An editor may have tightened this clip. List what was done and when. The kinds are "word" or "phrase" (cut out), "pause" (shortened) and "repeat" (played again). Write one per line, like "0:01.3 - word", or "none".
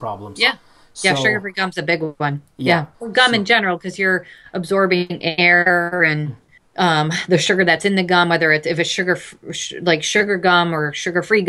0:02.9 - pause
0:06.6 - pause